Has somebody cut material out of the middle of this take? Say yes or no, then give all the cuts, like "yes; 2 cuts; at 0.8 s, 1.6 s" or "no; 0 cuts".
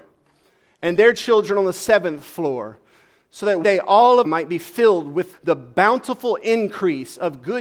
yes; 3 cuts; at 3.6 s, 4.2 s, 5.3 s